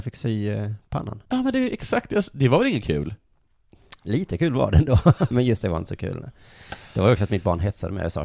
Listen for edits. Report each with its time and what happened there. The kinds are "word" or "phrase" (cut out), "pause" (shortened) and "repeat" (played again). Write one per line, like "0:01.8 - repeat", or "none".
0:01.2 - pause
0:05.3 - word